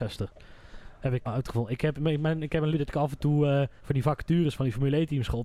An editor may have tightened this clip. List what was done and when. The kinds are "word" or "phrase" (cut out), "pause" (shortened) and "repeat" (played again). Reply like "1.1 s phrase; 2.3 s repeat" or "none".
1.2 s word; 2.7 s phrase; 3.8 s pause